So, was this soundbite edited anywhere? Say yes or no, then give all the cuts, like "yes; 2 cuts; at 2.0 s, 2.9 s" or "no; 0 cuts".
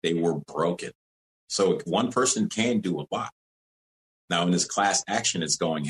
yes; 1 cut; at 1.0 s